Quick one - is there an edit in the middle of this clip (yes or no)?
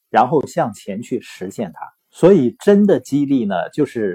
yes